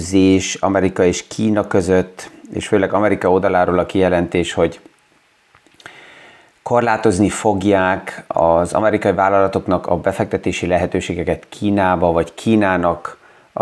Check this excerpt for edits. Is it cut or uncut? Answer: uncut